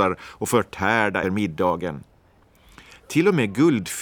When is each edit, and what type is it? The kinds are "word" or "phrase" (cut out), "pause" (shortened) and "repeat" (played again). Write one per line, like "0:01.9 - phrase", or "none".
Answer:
0:01.2 - word